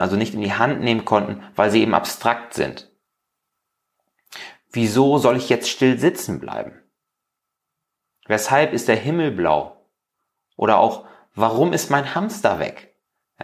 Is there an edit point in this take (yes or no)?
no